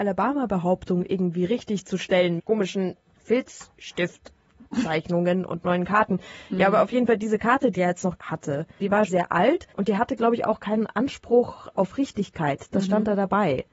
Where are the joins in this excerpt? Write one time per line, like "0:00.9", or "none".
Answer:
0:02.4
0:04.7
0:07.8
0:08.2
0:09.1
0:09.7